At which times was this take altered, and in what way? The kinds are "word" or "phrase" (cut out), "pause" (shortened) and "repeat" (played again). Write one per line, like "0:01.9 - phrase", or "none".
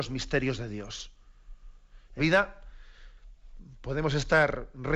0:02.2 - word